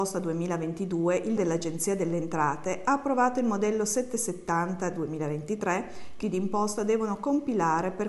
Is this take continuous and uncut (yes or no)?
no